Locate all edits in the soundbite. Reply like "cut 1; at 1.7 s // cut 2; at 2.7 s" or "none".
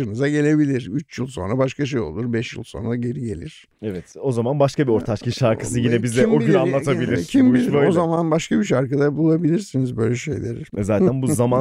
cut 1; at 10.7 s